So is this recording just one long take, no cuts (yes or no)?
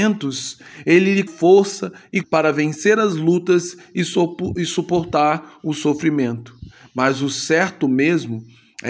no